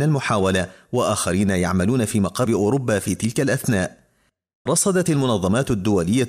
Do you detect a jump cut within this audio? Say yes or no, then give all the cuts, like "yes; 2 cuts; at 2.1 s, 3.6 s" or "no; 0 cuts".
yes; 2 cuts; at 2.5 s, 4.7 s